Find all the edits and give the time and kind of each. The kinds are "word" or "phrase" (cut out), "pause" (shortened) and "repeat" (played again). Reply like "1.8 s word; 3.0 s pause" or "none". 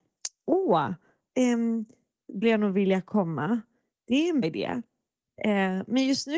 2.4 s phrase; 3.9 s pause; 4.4 s word